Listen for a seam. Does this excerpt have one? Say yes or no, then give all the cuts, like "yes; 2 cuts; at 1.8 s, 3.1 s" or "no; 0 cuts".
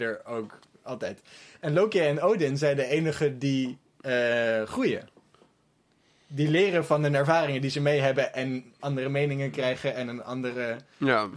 no; 0 cuts